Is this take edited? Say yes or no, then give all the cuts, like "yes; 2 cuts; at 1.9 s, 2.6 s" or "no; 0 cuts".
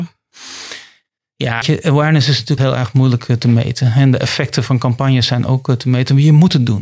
yes; 3 cuts; at 1.6 s, 2.6 s, 4.7 s